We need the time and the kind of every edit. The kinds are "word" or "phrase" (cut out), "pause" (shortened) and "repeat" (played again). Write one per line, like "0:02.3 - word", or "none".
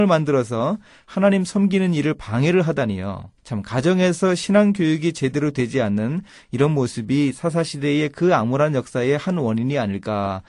0:03.4 - pause